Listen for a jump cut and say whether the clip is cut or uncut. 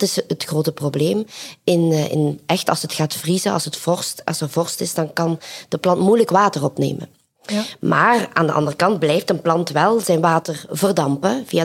uncut